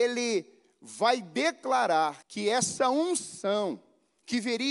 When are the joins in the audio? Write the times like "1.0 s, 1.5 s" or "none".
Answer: 2.2 s